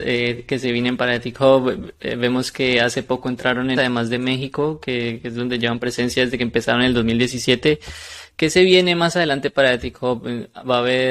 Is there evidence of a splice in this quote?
yes; 1 cut; at 3.8 s

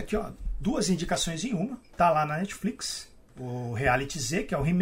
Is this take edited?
no; 0 cuts

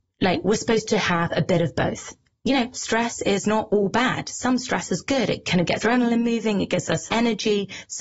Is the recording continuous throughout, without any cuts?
no; 2 cuts; at 5.8 s, 7.1 s

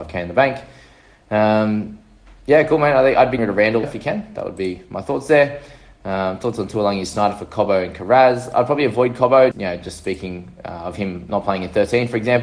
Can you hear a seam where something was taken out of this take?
yes; 3 cuts; at 3.4 s, 3.8 s, 9.5 s

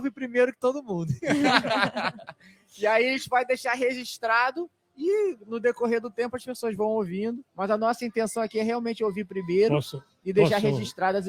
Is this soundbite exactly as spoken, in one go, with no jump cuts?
no; 1 cut; at 7.5 s

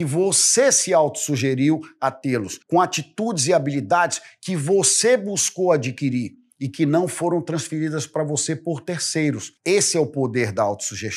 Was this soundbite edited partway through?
yes; 2 cuts; at 2.6 s, 9.6 s

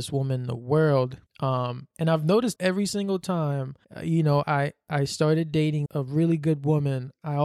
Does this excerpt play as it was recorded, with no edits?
no; 5 cuts; at 1.3 s, 2.6 s, 3.8 s, 4.4 s, 5.9 s

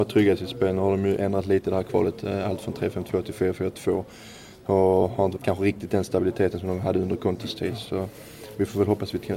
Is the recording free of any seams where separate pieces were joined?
no; 1 cut; at 5.4 s

